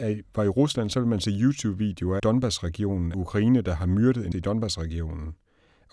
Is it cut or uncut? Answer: cut